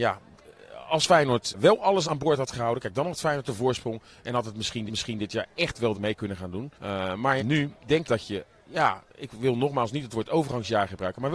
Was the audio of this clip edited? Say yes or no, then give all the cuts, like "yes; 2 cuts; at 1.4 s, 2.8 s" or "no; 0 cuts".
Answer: yes; 7 cuts; at 1.5 s, 2.0 s, 4.9 s, 5.9 s, 6.7 s, 7.4 s, 8.0 s